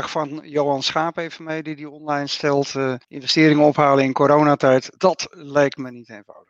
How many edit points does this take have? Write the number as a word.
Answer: two